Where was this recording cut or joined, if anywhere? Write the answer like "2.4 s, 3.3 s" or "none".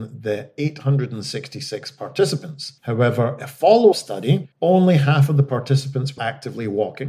2.8 s, 3.9 s, 4.5 s, 6.2 s